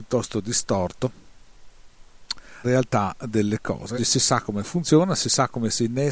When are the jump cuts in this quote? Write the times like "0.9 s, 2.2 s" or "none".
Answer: 2.6 s, 4.0 s